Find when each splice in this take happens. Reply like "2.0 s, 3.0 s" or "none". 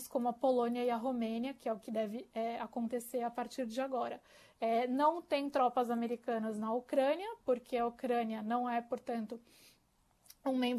none